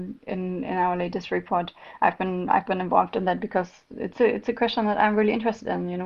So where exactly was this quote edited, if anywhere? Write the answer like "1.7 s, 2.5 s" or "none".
none

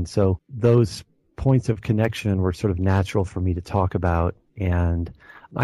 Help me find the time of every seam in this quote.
none

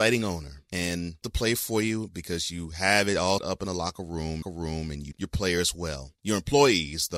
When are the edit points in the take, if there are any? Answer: 1.2 s, 3.4 s, 4.4 s, 5.1 s

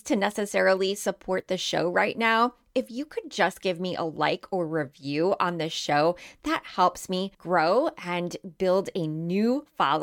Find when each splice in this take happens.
7.3 s

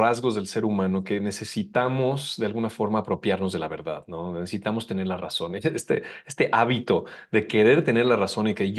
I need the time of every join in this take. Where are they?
none

